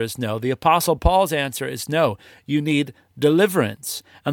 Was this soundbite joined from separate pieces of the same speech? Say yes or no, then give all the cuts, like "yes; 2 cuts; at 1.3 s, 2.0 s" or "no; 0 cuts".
no; 0 cuts